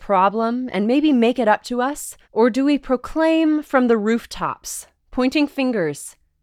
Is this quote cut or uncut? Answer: cut